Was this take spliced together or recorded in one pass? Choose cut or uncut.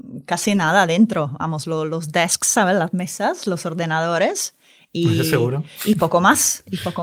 uncut